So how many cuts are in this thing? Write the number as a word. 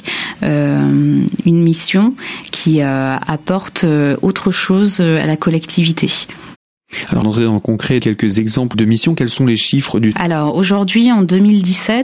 four